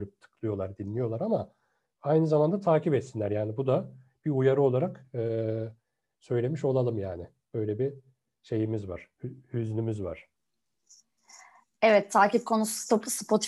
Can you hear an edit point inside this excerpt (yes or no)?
no